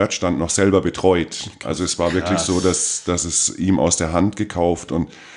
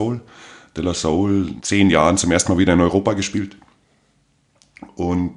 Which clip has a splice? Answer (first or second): second